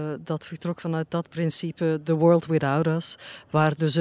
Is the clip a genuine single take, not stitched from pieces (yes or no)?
yes